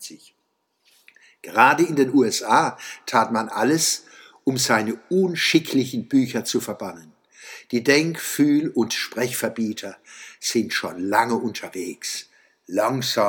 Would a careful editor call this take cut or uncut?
uncut